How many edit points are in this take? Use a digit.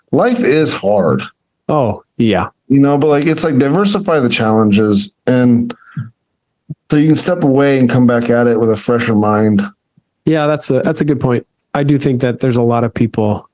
1